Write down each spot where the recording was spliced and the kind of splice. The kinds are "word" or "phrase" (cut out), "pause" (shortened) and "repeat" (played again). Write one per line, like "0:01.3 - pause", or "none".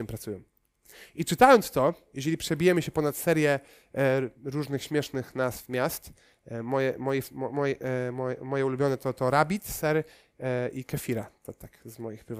none

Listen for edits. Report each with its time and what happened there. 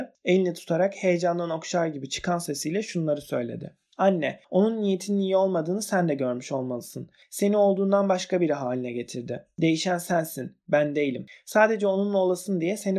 0:04.4 - pause

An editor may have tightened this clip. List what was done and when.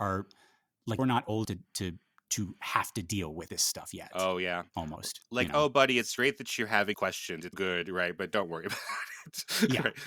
0:01.0 - word
0:01.4 - word
0:03.5 - word
0:06.9 - word
0:07.5 - word

